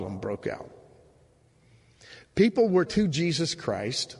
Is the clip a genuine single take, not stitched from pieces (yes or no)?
no